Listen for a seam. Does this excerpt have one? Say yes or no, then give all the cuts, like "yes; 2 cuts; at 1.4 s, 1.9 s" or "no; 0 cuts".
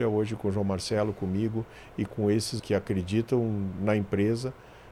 yes; 2 cuts; at 2.1 s, 2.6 s